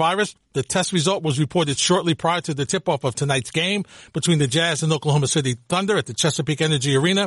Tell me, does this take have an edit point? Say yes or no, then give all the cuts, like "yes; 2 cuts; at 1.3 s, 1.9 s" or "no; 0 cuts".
no; 0 cuts